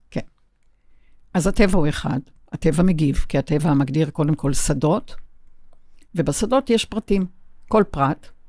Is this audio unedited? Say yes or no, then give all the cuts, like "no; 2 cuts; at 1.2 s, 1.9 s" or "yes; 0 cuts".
yes; 0 cuts